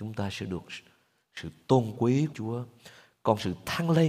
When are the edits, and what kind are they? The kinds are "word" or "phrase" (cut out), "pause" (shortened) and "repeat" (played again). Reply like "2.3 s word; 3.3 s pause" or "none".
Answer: 2.3 s word